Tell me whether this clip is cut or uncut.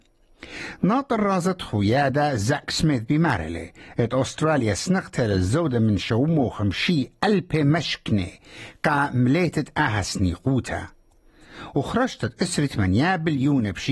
uncut